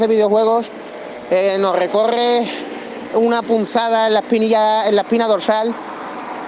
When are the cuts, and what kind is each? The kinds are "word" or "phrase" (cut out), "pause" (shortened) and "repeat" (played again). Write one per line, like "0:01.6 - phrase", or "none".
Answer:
none